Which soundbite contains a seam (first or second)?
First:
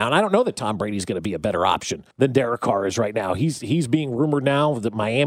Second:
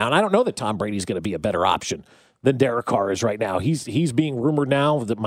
first